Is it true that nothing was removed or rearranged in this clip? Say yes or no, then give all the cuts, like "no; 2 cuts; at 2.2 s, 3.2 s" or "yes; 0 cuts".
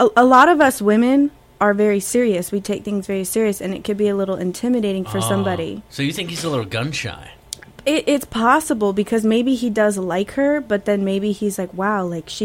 yes; 0 cuts